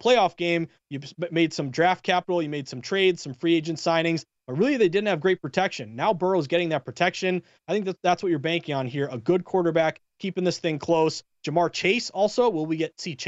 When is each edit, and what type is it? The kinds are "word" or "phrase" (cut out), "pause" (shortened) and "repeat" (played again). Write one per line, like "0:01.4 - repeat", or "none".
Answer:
none